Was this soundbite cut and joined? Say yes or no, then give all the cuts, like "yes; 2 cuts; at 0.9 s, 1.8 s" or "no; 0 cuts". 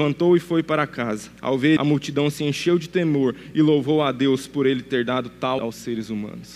yes; 3 cuts; at 1.4 s, 1.8 s, 5.6 s